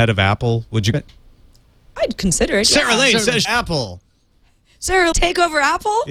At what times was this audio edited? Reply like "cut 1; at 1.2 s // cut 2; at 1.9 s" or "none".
cut 1; at 0.9 s // cut 2; at 3.4 s // cut 3; at 5.1 s